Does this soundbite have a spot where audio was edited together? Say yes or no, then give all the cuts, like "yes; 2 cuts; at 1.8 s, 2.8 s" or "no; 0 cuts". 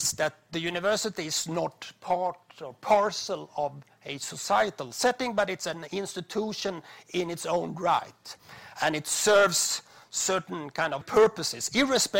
yes; 1 cut; at 11.0 s